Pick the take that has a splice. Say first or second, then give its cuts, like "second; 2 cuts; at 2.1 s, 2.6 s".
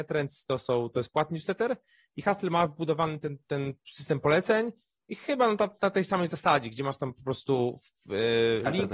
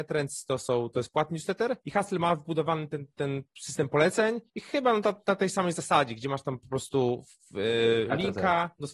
second; 2 cuts; at 1.8 s, 4.5 s